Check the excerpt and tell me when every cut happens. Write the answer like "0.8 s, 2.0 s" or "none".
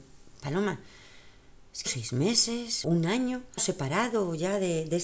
1.9 s, 2.8 s, 3.6 s